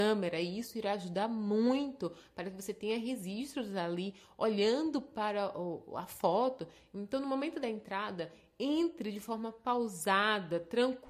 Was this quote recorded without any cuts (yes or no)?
yes